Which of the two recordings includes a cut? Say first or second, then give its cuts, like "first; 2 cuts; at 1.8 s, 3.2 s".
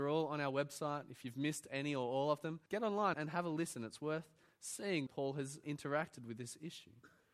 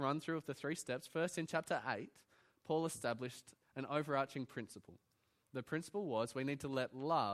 first; 4 cuts; at 2.7 s, 3.1 s, 5.1 s, 5.6 s